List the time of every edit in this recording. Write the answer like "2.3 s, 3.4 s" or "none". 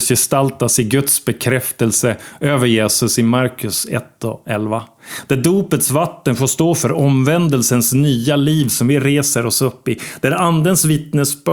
none